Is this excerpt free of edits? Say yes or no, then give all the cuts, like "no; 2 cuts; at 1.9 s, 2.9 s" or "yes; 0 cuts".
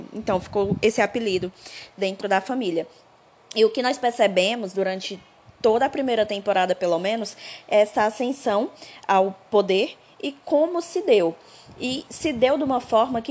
yes; 0 cuts